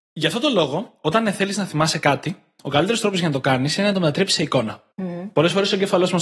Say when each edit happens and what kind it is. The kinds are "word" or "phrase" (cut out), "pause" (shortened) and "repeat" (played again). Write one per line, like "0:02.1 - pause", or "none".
0:04.9 - pause